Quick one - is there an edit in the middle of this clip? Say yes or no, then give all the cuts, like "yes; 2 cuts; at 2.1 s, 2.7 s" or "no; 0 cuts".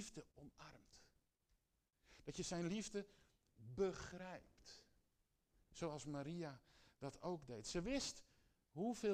no; 0 cuts